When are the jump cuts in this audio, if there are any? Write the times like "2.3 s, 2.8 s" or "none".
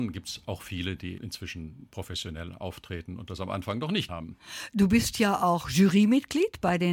1.2 s, 4.1 s